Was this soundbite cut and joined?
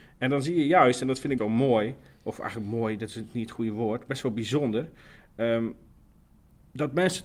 yes; 1 cut; at 1.4 s

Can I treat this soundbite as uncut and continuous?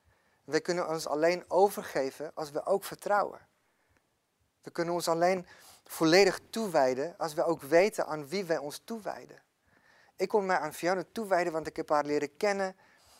yes; 0 cuts

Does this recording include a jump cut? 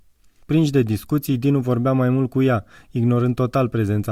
no; 0 cuts

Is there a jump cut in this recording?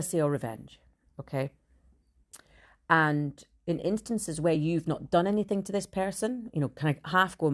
no; 0 cuts

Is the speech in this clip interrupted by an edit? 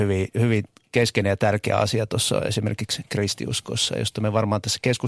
no; 0 cuts

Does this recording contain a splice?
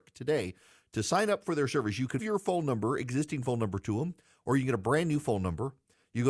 yes; 1 cut; at 2.2 s

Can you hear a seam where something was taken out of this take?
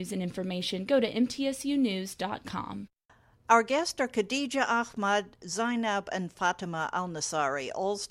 no; 0 cuts

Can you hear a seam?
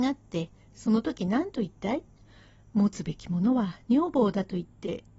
no; 0 cuts

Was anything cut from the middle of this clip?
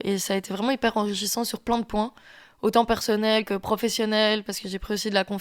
no; 0 cuts

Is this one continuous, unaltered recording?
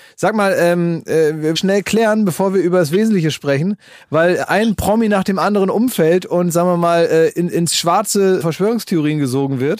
no; 4 cuts; at 1.6 s, 4.5 s, 7.3 s, 8.4 s

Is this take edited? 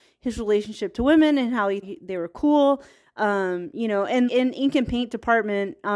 yes; 2 cuts; at 1.8 s, 4.3 s

